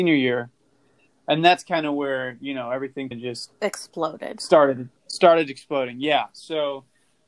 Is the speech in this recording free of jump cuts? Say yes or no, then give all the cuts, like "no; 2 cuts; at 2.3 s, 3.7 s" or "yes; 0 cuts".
no; 3 cuts; at 3.1 s, 3.5 s, 5.0 s